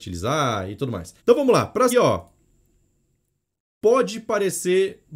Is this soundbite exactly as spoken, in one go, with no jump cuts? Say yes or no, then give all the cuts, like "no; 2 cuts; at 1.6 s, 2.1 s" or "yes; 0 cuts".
no; 2 cuts; at 1.2 s, 1.9 s